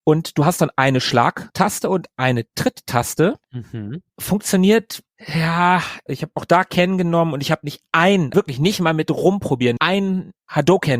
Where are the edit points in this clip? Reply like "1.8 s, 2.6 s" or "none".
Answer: 4.1 s, 8.3 s, 9.8 s